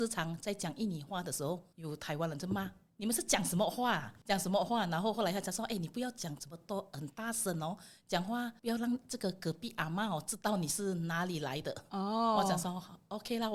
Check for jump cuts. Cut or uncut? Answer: cut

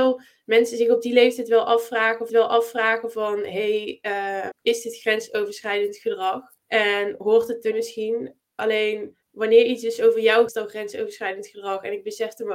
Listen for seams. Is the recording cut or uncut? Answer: cut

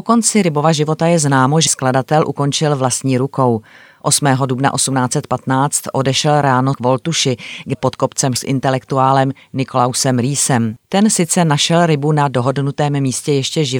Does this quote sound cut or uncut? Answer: cut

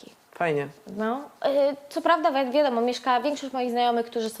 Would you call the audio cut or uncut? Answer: uncut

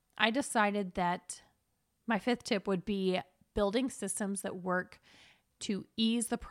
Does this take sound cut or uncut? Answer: uncut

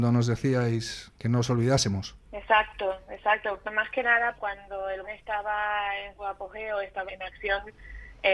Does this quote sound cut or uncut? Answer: cut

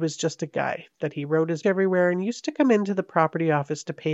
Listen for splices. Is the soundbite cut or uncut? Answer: cut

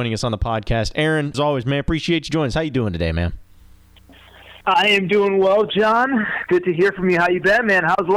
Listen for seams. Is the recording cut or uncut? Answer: cut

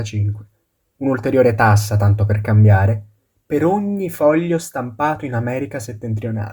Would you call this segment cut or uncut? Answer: uncut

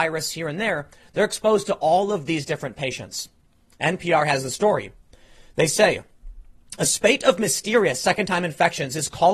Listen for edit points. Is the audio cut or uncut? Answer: uncut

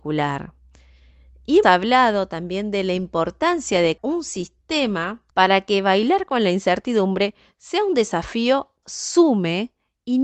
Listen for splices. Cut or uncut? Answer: cut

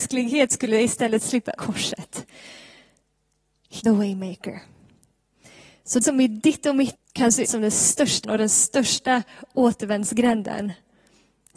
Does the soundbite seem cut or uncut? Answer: cut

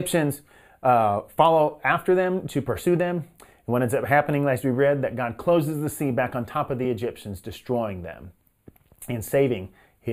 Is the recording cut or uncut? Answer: uncut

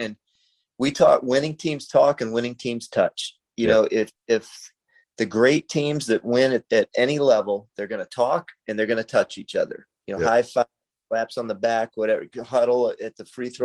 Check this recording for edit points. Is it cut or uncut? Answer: uncut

